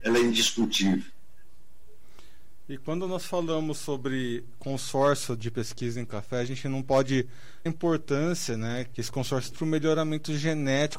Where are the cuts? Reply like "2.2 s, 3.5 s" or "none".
7.7 s, 8.9 s, 9.5 s